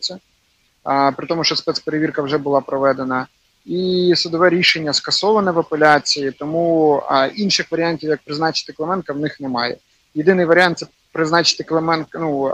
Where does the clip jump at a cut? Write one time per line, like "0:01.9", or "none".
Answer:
none